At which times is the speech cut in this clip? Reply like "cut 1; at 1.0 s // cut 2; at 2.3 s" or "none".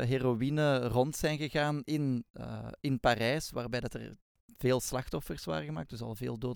none